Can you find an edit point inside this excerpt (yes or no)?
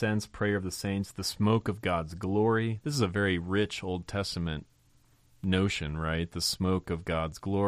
no